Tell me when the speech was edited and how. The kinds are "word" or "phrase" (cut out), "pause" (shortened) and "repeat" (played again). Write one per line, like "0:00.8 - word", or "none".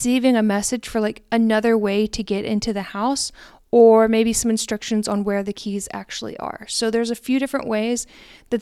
none